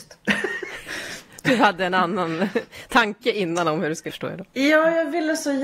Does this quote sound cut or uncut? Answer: cut